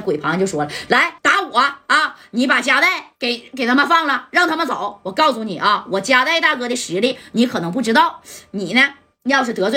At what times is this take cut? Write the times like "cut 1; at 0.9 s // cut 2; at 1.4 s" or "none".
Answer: cut 1; at 1.2 s